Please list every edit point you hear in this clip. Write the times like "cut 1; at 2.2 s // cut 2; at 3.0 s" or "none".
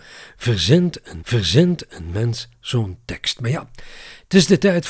cut 1; at 1.2 s

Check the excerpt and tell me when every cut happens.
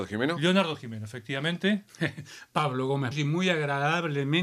cut 1; at 3.1 s

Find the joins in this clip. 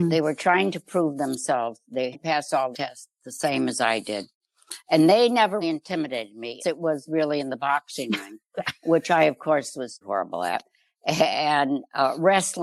cut 1; at 2.1 s // cut 2; at 2.7 s // cut 3; at 5.6 s // cut 4; at 6.6 s // cut 5; at 10.0 s

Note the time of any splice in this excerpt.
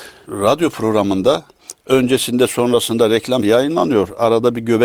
cut 1; at 1.7 s // cut 2; at 3.4 s

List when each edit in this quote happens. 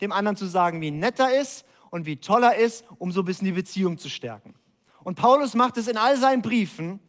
none

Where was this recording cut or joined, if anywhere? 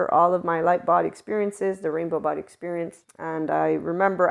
cut 1; at 3.0 s

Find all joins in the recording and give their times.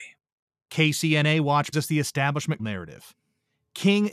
cut 1; at 1.7 s // cut 2; at 2.6 s

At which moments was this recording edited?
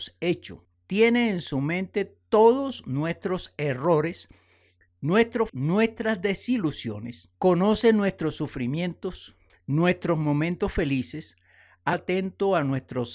cut 1; at 5.5 s // cut 2; at 7.3 s // cut 3; at 11.9 s

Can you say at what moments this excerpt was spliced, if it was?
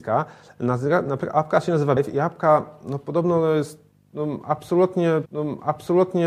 cut 1; at 2.0 s // cut 2; at 5.3 s

